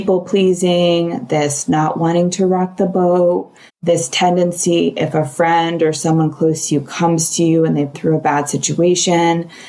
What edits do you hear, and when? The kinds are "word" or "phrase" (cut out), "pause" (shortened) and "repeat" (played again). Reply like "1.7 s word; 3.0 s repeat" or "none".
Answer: 3.7 s pause; 7.9 s word